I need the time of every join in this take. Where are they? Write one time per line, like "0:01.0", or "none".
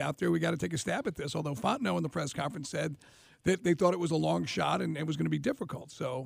none